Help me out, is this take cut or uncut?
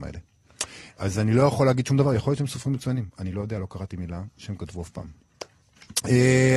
uncut